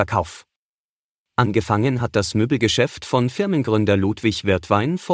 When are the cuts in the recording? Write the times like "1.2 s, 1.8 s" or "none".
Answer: none